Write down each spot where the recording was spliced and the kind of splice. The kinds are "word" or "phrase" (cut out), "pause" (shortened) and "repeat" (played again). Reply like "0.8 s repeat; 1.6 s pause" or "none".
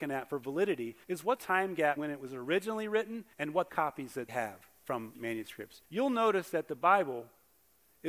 1.0 s pause; 1.4 s word; 2.0 s word; 3.3 s pause; 3.7 s phrase; 4.3 s word; 5.1 s word; 5.8 s pause

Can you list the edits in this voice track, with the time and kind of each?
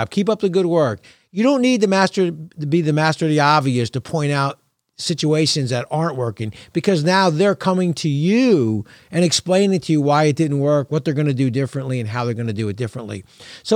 none

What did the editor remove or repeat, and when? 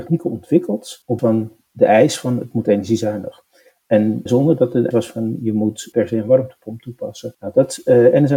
1.2 s word; 4.3 s word; 4.9 s word

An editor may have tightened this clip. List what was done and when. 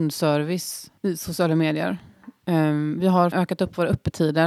1.0 s pause; 3.3 s word

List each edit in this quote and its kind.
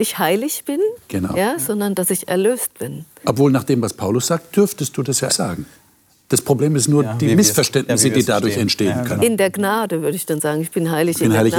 5.3 s word

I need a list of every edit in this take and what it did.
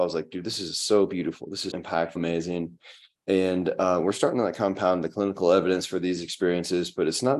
1.7 s word; 2.2 s word

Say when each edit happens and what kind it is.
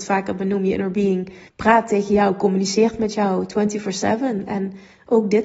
1.5 s pause

